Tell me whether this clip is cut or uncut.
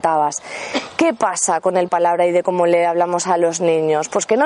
cut